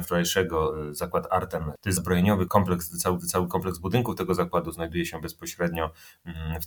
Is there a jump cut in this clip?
yes; 3 cuts; at 2.0 s, 2.5 s, 3.2 s

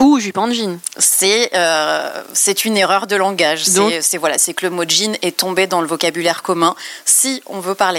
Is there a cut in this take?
no; 0 cuts

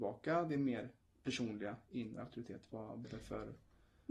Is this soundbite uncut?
no; 2 cuts; at 1.0 s, 3.0 s

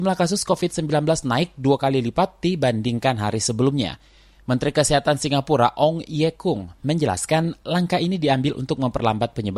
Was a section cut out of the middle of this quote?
no; 0 cuts

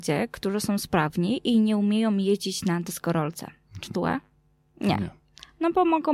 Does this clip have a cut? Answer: yes; 2 cuts; at 3.9 s, 4.3 s

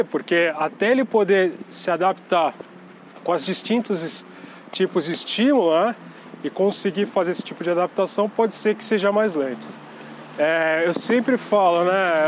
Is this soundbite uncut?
yes; 0 cuts

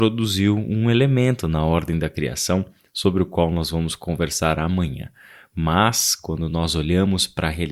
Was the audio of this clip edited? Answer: no; 0 cuts

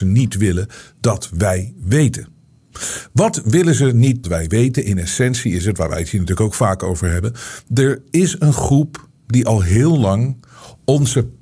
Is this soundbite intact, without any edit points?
no; 1 cut; at 4.2 s

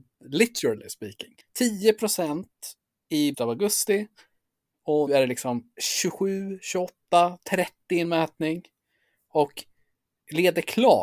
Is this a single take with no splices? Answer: no; 5 cuts; at 1.4 s, 3.3 s, 5.1 s, 7.4 s, 8.0 s

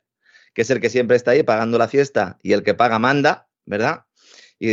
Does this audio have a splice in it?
no; 0 cuts

